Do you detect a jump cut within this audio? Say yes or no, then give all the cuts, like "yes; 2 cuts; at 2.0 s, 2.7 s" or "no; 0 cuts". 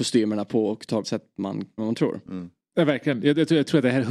yes; 2 cuts; at 1.0 s, 1.8 s